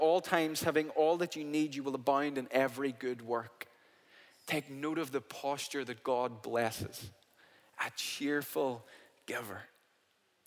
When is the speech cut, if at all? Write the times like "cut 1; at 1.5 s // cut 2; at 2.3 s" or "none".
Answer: none

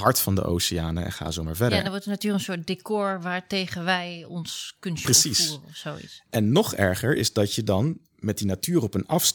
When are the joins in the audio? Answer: none

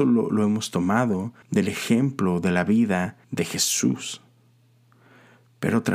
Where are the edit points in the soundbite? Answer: cut 1; at 1.4 s // cut 2; at 3.2 s

